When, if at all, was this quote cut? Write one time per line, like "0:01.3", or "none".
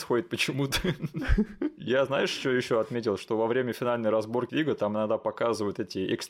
0:04.5